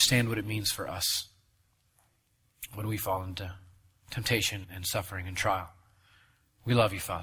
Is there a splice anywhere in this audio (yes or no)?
yes